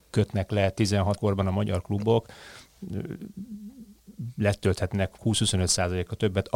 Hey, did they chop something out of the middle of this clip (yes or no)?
yes